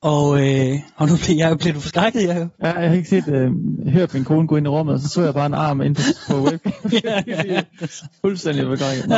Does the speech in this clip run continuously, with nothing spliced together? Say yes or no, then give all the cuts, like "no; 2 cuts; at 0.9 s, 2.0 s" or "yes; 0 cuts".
no; 1 cut; at 2.5 s